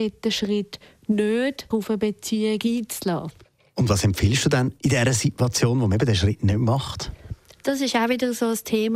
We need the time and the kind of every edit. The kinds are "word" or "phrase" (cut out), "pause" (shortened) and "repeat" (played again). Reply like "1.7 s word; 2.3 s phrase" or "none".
1.7 s word